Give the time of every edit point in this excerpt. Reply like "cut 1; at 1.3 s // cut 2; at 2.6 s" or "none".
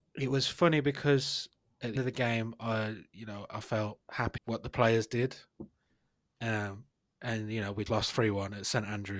cut 1; at 2.0 s // cut 2; at 4.4 s // cut 3; at 7.9 s